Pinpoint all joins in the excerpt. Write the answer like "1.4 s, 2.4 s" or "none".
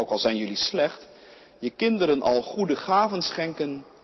none